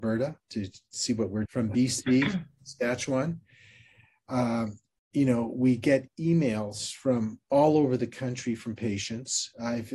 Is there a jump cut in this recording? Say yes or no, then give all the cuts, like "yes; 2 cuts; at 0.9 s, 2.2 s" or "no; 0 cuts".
yes; 1 cut; at 1.4 s